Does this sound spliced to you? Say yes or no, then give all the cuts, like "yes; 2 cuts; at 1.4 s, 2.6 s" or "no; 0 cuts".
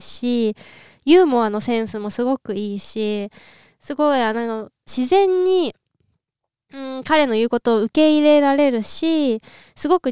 no; 0 cuts